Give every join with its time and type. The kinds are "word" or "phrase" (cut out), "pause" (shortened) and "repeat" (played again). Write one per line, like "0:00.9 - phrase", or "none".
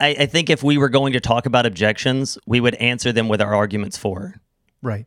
none